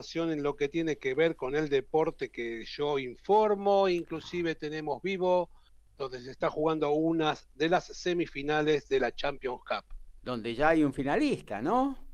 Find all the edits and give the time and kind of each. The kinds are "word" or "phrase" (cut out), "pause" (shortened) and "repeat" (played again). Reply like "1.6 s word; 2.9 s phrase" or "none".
none